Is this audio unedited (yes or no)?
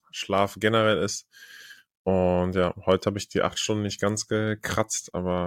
yes